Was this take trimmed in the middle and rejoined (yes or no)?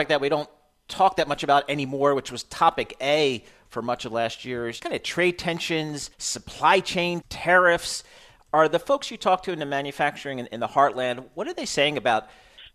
yes